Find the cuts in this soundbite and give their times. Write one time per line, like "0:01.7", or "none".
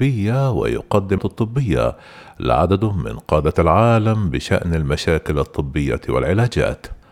0:01.2